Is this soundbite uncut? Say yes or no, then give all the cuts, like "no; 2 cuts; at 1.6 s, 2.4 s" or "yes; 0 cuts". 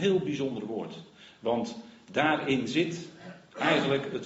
yes; 0 cuts